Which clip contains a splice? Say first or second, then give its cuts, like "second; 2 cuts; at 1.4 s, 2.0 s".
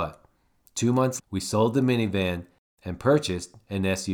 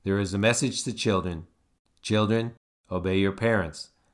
first; 1 cut; at 1.2 s